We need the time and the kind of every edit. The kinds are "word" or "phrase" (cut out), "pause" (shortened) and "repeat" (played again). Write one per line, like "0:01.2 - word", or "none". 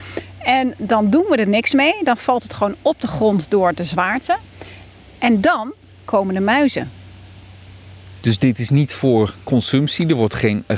none